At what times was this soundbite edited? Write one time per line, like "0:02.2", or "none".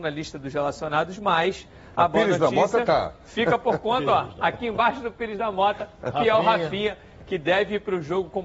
none